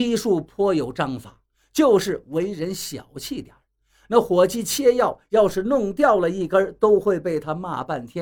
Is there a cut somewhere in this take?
no; 0 cuts

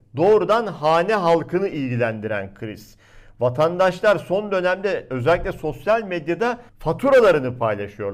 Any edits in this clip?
yes; 1 cut; at 6.7 s

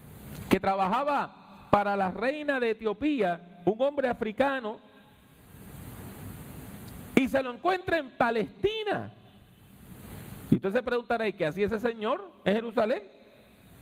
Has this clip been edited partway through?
no; 0 cuts

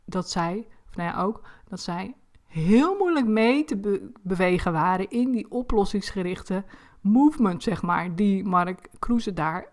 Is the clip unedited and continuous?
yes; 0 cuts

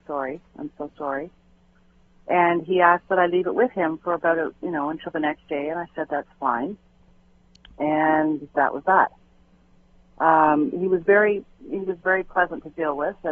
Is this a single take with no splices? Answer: yes; 0 cuts

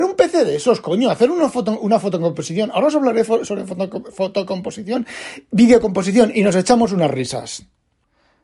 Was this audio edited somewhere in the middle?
no; 0 cuts

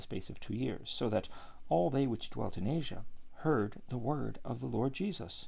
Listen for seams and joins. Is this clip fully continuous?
yes; 0 cuts

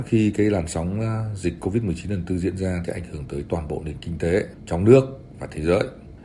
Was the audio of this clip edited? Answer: yes; 1 cut; at 2.9 s

